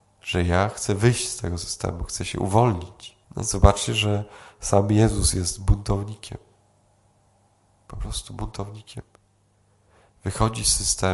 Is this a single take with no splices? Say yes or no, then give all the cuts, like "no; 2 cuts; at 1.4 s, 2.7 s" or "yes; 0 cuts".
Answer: no; 1 cut; at 3.2 s